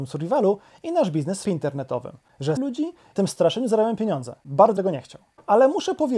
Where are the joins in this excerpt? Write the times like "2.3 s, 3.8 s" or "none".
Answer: 1.4 s, 2.6 s, 3.2 s, 4.8 s

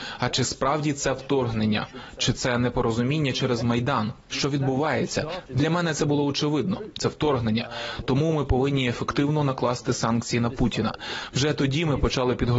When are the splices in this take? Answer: none

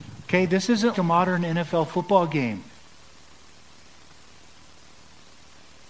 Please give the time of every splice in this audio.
0.9 s

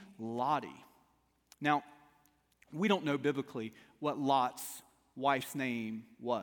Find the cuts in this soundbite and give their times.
none

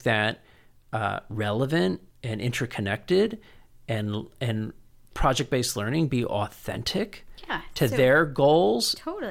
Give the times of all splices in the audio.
none

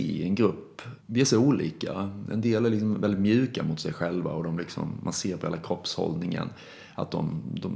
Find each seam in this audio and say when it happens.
1.0 s

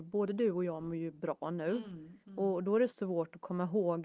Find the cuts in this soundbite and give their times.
2.2 s, 2.9 s

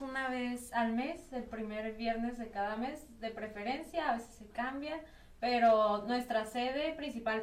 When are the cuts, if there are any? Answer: none

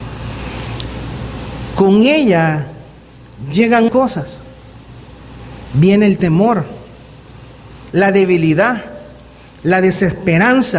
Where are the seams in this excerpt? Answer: 3.9 s, 7.9 s

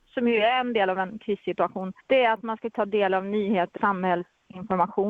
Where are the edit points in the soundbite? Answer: 2.0 s, 2.7 s, 3.8 s

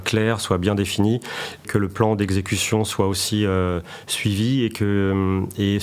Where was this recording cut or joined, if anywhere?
1.6 s

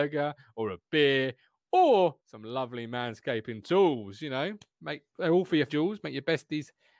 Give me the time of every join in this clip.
2.2 s, 5.1 s, 5.7 s

